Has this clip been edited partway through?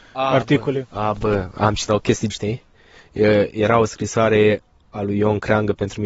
yes; 2 cuts; at 1.9 s, 2.3 s

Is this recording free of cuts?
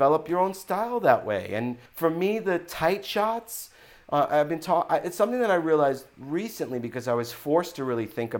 no; 1 cut; at 1.9 s

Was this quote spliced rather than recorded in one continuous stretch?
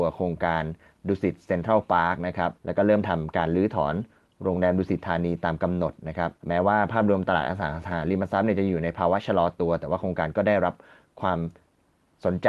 yes; 2 cuts; at 2.6 s, 6.4 s

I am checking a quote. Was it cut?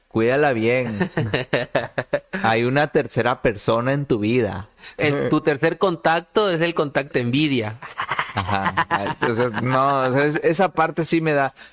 yes; 1 cut; at 7.1 s

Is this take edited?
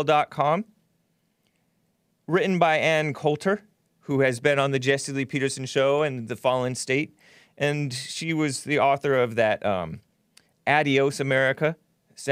no; 0 cuts

